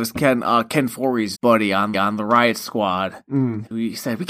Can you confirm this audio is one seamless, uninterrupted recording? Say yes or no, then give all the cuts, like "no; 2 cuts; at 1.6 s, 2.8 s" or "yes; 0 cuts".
no; 2 cuts; at 1.3 s, 1.9 s